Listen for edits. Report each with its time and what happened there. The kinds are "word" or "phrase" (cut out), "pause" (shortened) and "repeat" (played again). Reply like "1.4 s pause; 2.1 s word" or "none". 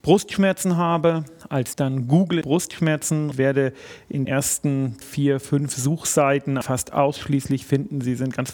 1.7 s word; 2.4 s word; 3.3 s word; 4.3 s word; 5.0 s word; 6.6 s word